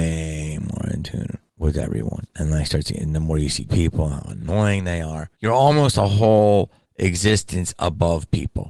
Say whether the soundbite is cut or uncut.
cut